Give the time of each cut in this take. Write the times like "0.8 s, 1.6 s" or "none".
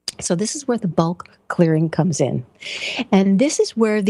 none